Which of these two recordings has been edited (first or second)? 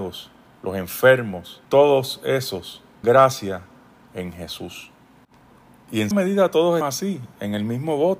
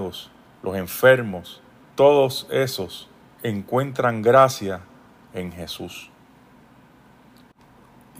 first